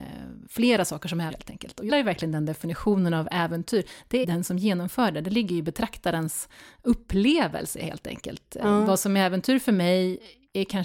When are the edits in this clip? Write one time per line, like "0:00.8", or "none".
0:01.3
0:01.9
0:04.2

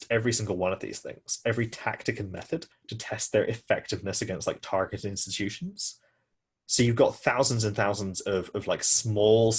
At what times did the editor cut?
none

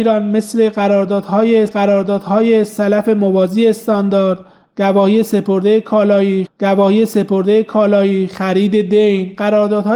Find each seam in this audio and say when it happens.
0:01.7
0:06.5

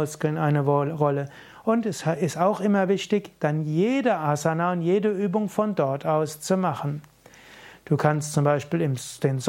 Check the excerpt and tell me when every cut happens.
none

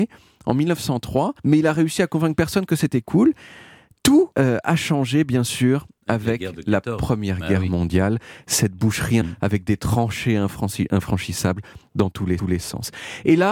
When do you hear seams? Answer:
0:01.4
0:04.3
0:09.2
0:12.4

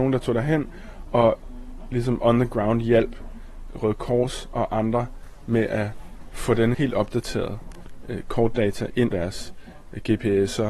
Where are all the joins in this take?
0:06.7
0:09.1

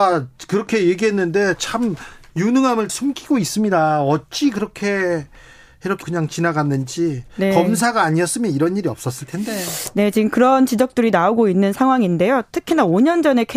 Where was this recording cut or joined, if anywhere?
0:02.9
0:06.0

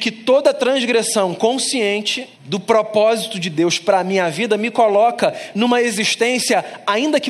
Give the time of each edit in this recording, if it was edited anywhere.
0:02.3

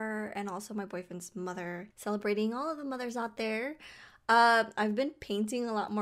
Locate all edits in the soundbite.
0:01.9

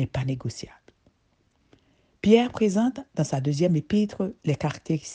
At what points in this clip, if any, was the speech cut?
none

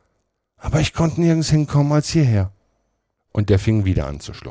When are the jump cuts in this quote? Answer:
none

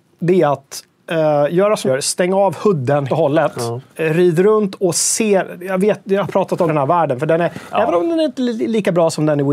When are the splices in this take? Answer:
0:01.9
0:03.1
0:03.9
0:06.7

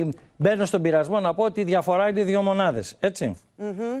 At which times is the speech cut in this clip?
none

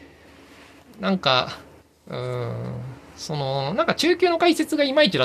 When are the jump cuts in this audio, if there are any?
0:01.8

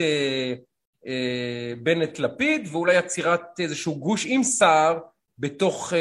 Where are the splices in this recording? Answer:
none

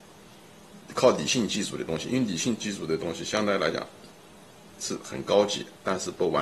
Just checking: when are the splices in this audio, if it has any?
none

